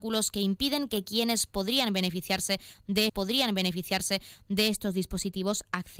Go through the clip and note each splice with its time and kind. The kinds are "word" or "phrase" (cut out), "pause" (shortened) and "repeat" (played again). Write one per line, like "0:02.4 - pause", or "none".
0:03.1 - repeat